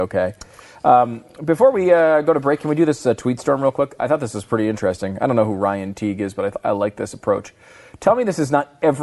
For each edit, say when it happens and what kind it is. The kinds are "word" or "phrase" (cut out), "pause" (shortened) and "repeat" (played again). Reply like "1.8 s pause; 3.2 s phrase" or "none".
none